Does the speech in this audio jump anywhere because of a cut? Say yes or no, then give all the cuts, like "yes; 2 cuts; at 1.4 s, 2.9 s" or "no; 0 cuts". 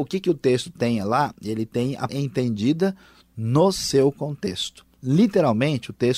yes; 1 cut; at 2.1 s